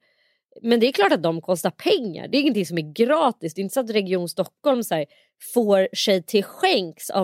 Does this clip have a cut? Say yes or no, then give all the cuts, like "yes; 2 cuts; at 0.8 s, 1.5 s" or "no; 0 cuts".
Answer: no; 0 cuts